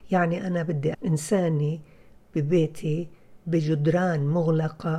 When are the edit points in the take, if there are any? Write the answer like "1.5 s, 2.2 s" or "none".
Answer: 0.9 s